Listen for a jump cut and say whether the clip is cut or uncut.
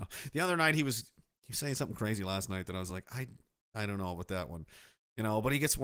uncut